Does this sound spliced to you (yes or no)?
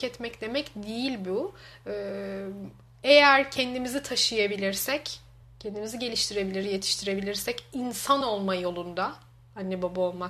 no